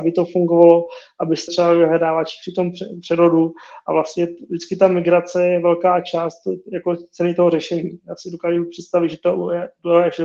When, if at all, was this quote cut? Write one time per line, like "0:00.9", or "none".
0:01.5